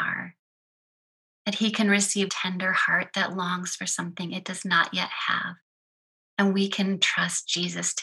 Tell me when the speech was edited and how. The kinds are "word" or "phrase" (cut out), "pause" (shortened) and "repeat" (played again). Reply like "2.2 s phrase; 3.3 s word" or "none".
2.3 s phrase; 6.0 s pause